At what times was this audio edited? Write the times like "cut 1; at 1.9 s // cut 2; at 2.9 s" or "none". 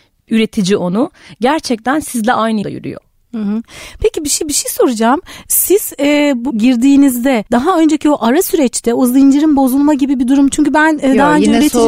cut 1; at 2.6 s // cut 2; at 4.4 s // cut 3; at 6.5 s // cut 4; at 7.5 s

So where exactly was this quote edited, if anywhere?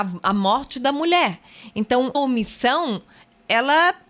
cut 1; at 2.1 s

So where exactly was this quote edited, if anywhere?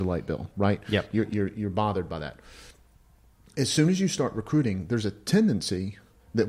none

